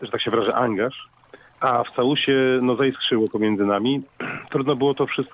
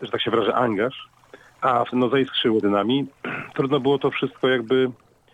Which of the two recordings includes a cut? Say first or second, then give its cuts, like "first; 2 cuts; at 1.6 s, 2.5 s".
second; 2 cuts; at 1.9 s, 2.6 s